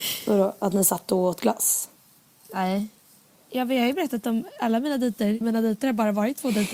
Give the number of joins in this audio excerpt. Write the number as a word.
two